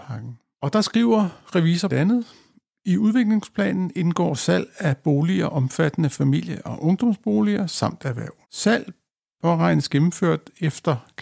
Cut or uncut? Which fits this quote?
cut